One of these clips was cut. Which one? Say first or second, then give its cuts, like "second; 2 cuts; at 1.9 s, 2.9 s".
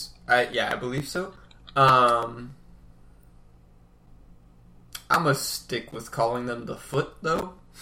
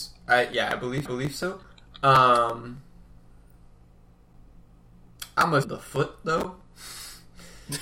second; 2 cuts; at 1.1 s, 5.6 s